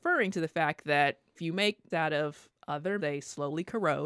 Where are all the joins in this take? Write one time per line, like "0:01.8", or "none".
0:01.4
0:01.9
0:03.0

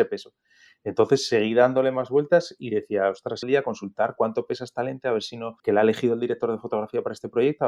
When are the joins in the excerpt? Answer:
0:03.4
0:05.6

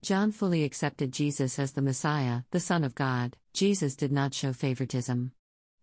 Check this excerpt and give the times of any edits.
0:02.5
0:03.4

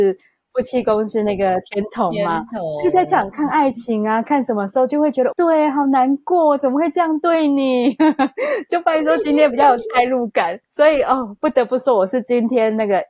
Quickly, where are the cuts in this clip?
0:05.3
0:10.6

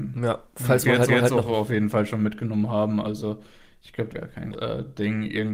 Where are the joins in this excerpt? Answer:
0:01.1
0:04.1
0:04.5

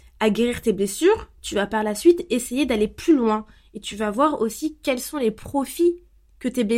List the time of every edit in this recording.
none

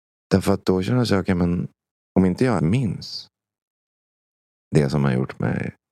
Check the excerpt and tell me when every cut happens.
0:01.9
0:02.6

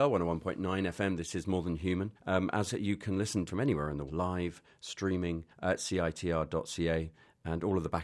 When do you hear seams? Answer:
0:02.2
0:02.7
0:03.5
0:04.1
0:05.5

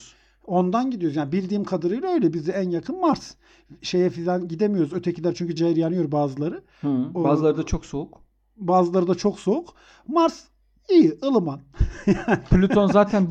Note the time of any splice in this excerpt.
0:05.6

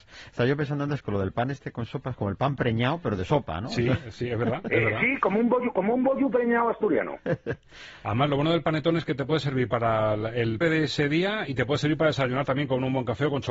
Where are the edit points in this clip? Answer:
0:10.6

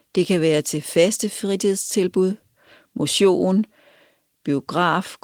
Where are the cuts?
none

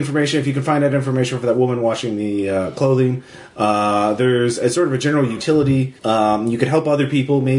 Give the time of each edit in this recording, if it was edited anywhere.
0:06.0

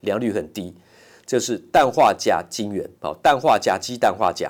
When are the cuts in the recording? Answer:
0:03.0

